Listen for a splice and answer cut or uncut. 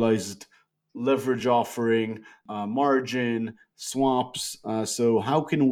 uncut